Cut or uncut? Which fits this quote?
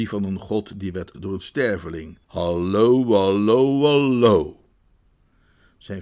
cut